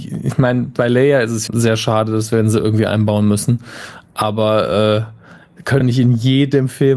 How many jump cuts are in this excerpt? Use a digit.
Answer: 2